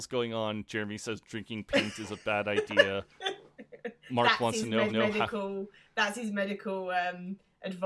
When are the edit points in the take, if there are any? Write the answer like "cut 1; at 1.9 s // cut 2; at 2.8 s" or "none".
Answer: cut 1; at 4.9 s